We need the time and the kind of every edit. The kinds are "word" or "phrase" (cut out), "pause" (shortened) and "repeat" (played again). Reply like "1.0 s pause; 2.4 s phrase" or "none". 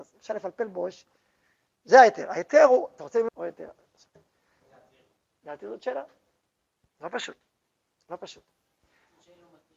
3.3 s word

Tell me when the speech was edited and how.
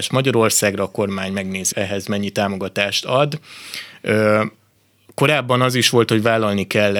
1.7 s word

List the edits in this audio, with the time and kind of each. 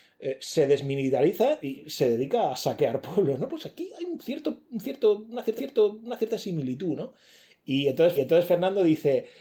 4.2 s word; 5.6 s repeat; 8.2 s repeat

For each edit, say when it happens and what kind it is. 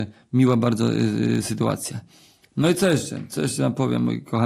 none

